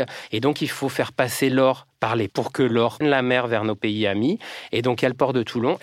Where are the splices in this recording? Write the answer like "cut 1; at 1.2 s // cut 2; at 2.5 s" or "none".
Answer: cut 1; at 2.3 s // cut 2; at 3.0 s